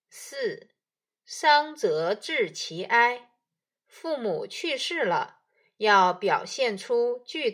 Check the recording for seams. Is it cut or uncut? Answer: uncut